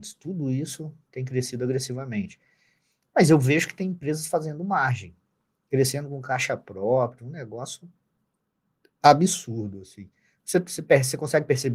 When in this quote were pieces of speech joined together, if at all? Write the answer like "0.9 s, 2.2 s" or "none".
none

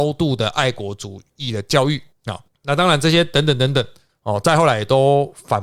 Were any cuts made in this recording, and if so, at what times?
none

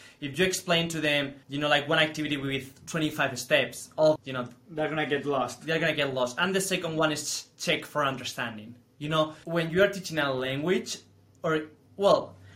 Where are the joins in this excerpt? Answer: 1.4 s, 4.2 s, 9.4 s

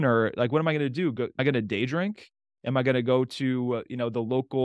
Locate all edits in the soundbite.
none

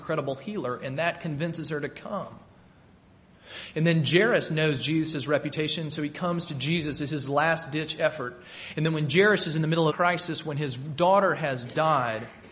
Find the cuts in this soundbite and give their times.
9.9 s

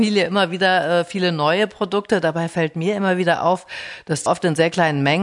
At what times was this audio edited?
4.3 s

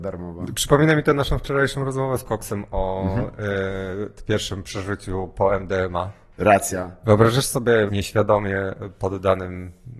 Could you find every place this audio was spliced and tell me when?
2.3 s, 7.9 s

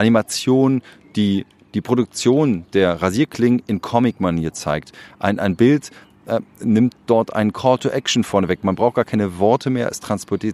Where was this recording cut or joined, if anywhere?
none

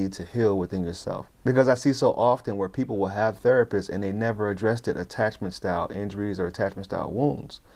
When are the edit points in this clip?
none

